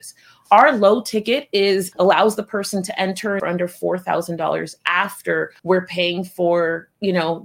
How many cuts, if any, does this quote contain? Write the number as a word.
three